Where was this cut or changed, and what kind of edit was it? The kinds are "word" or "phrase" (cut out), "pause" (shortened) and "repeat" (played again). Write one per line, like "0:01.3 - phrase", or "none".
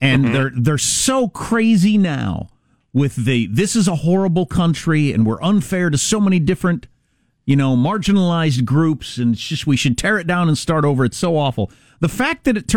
none